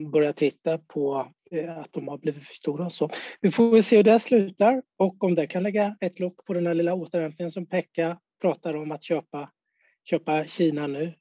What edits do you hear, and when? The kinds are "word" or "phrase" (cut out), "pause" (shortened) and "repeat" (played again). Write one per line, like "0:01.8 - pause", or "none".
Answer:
0:01.4 - pause

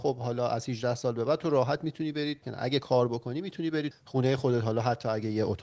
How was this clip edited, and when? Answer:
0:02.4 - word
0:03.9 - word

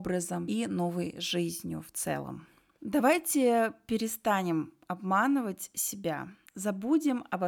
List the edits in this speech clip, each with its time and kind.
none

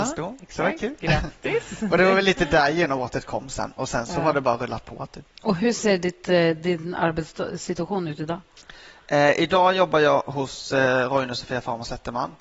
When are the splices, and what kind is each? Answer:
0:05.3 - pause

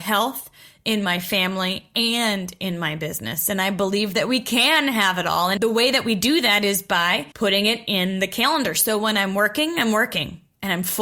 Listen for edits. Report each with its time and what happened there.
0:07.3 - pause

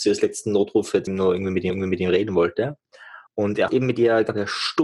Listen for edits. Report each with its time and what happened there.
0:01.1 - word
0:01.7 - repeat
0:03.3 - pause
0:03.7 - word

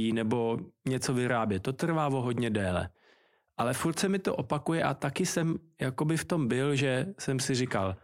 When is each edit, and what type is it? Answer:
none

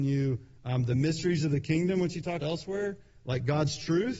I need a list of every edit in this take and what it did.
0:02.4 - word

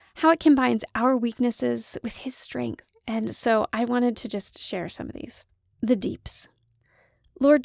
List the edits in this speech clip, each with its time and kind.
none

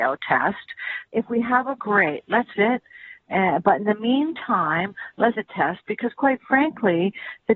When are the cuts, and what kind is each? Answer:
0:01.1 - word
0:01.8 - word
0:02.5 - word
0:05.4 - word

